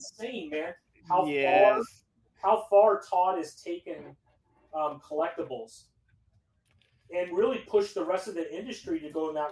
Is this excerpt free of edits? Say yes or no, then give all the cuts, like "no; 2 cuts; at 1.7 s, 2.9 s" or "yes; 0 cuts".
yes; 0 cuts